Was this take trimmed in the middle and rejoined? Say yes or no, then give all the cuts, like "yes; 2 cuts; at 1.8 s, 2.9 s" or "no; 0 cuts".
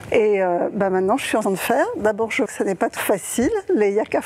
yes; 3 cuts; at 1.4 s, 2.5 s, 3.0 s